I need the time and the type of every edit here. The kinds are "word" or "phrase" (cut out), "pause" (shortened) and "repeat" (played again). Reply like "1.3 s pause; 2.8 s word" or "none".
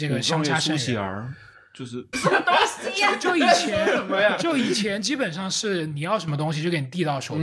2.1 s word